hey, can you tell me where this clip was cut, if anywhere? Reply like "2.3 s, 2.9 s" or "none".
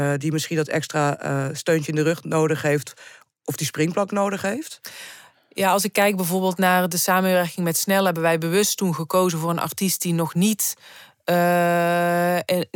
none